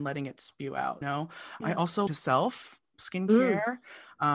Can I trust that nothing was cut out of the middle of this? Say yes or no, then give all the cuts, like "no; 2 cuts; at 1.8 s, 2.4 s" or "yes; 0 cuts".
no; 3 cuts; at 1.0 s, 1.6 s, 2.1 s